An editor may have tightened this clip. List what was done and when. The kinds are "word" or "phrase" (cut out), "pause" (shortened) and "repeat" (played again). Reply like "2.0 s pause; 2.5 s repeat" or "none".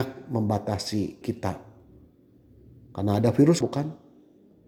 1.2 s word; 3.6 s word